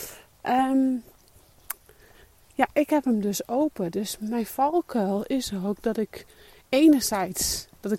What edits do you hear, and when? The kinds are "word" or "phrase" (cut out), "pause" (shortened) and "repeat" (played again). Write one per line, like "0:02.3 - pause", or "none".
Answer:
none